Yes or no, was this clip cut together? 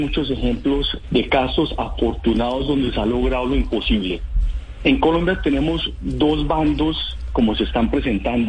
yes